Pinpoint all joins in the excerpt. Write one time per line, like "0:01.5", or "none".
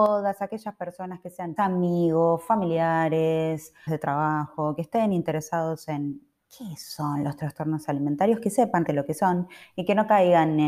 0:01.6
0:03.9
0:08.9